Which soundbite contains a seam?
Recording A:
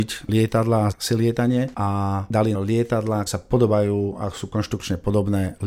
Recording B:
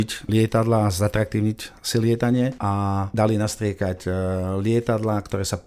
A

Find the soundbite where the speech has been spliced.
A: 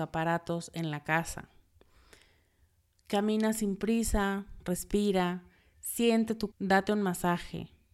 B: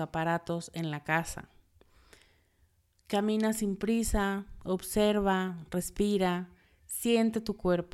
A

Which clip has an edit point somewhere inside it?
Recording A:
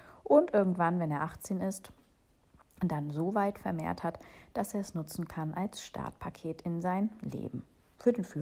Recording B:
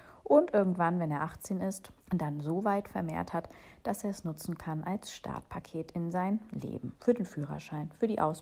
B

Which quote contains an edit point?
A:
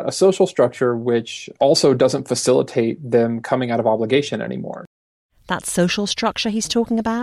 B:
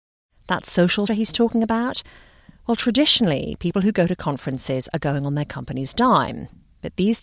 B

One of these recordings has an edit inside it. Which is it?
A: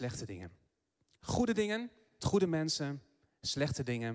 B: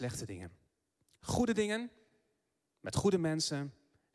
A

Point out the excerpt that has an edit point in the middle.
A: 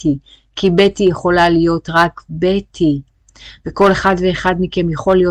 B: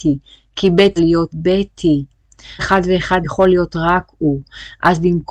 B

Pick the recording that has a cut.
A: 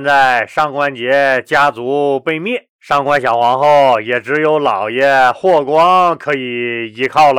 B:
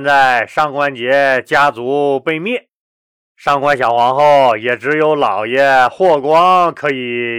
A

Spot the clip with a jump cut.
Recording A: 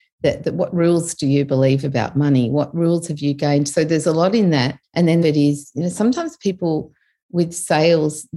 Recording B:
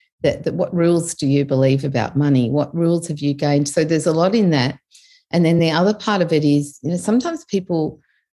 A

